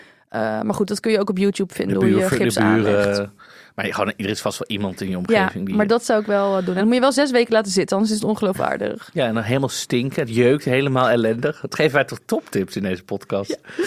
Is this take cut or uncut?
uncut